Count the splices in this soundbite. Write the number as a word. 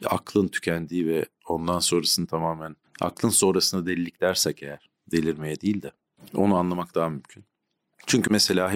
zero